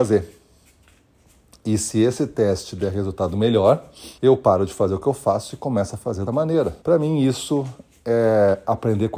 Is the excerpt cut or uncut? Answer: cut